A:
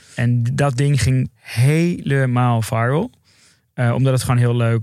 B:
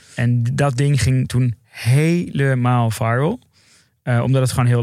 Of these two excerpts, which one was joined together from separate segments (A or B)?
A